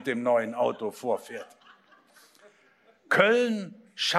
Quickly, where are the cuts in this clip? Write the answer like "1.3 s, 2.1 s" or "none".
none